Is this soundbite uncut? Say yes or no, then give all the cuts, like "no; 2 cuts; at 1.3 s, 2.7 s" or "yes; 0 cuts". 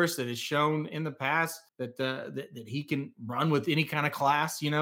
no; 1 cut; at 1.7 s